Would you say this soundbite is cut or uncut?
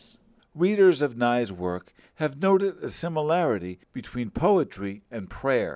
uncut